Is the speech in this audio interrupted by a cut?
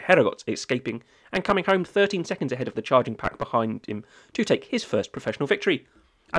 no; 0 cuts

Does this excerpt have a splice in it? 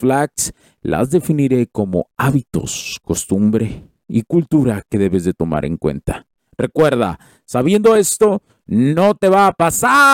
no; 0 cuts

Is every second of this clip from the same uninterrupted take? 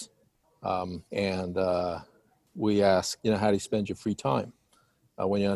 no; 2 cuts; at 1.1 s, 3.2 s

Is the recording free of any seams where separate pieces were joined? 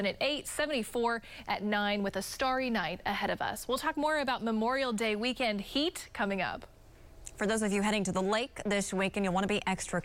yes; 0 cuts

